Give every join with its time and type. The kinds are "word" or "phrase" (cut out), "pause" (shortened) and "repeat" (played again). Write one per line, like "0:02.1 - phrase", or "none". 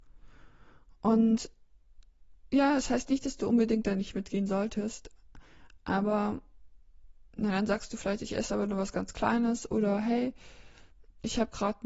0:07.3 - pause

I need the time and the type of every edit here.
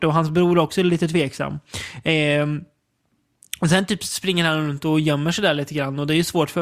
none

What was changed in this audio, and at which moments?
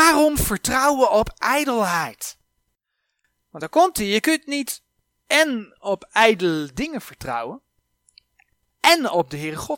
none

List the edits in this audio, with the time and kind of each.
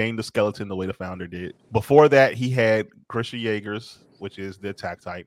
0:01.6 - pause

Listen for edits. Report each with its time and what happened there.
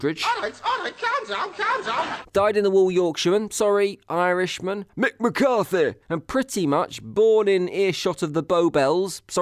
0:06.0 - pause

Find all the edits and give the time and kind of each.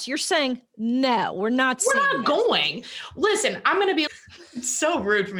0:04.1 - word

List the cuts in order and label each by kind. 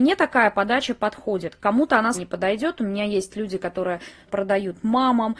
0:02.1 - word
0:04.3 - word

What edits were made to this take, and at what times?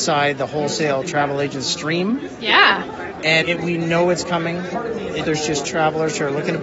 0:03.4 - word
0:05.2 - word
0:05.6 - phrase

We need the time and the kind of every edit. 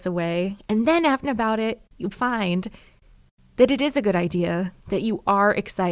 0:01.2 - phrase
0:02.1 - word
0:04.8 - pause

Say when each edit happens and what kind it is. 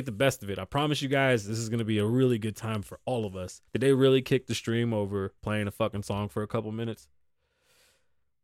0:03.7 - pause
0:05.4 - pause

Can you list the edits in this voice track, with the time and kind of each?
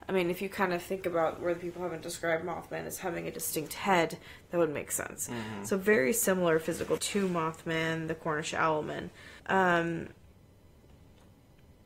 0:07.0 - word
0:09.4 - pause

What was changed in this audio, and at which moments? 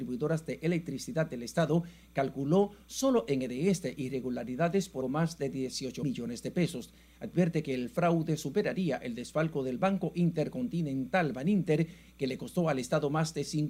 0:05.0 - word
0:06.0 - word

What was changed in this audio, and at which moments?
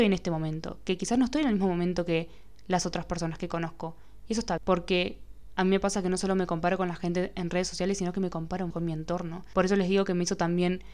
0:04.6 - word
0:08.7 - word

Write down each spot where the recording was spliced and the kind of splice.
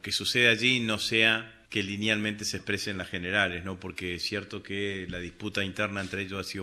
0:01.6 - pause

